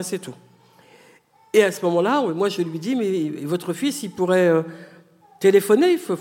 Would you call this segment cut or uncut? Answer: uncut